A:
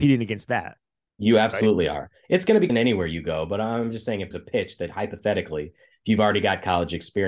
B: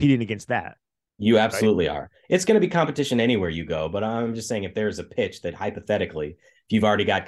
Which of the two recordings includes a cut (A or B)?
A